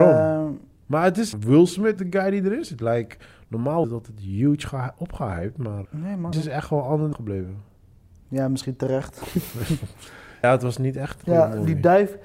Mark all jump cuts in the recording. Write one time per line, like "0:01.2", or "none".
0:01.3
0:02.0
0:03.8
0:05.8
0:06.3
0:07.1
0:10.4
0:11.2